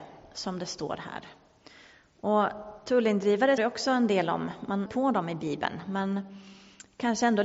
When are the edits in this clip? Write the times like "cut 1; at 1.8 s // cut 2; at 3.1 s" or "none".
cut 1; at 3.6 s // cut 2; at 4.9 s